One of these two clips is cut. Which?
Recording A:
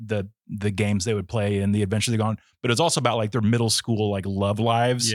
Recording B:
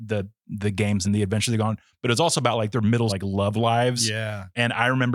B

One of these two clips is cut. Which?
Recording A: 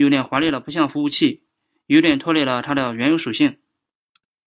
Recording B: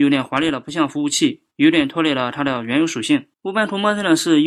B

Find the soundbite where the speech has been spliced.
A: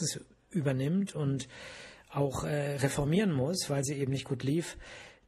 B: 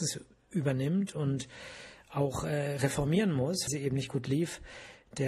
B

